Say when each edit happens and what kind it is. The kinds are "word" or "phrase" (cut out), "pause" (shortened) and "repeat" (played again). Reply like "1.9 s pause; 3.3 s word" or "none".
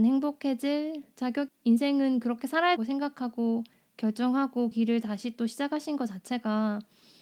1.5 s word; 2.8 s word; 4.7 s word